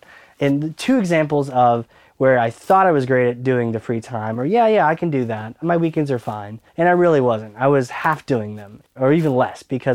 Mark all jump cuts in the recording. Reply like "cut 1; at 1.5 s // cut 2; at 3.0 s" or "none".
cut 1; at 6.7 s // cut 2; at 8.9 s